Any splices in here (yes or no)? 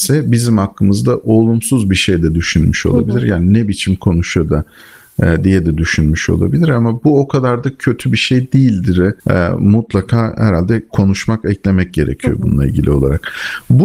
yes